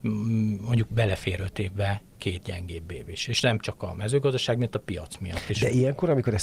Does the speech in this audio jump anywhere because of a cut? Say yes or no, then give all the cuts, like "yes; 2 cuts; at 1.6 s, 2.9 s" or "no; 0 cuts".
no; 0 cuts